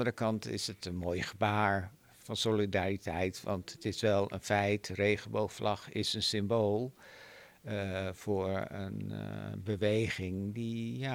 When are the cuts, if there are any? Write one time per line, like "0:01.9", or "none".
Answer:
none